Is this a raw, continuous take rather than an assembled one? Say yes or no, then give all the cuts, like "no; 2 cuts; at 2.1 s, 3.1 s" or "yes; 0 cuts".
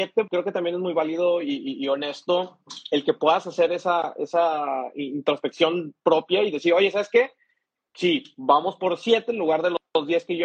yes; 0 cuts